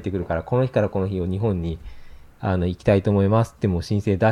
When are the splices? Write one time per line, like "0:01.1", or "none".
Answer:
none